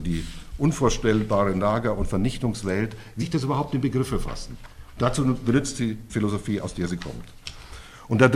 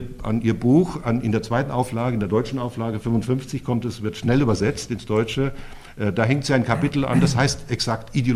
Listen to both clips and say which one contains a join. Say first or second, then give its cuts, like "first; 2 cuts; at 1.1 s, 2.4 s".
first; 2 cuts; at 3.2 s, 6.1 s